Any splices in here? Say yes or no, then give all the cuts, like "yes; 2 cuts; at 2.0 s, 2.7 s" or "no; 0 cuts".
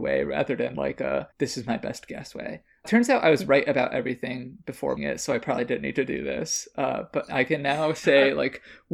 yes; 3 cuts; at 1.3 s, 2.8 s, 5.0 s